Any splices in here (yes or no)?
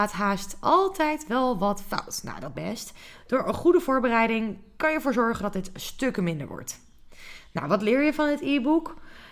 yes